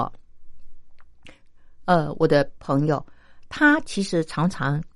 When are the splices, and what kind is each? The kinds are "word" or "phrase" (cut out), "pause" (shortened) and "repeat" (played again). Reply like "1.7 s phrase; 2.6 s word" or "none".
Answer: none